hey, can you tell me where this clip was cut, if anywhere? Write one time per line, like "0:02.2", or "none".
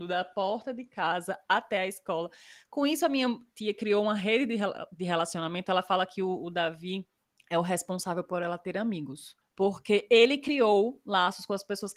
none